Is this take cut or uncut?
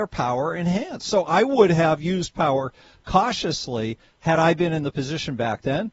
uncut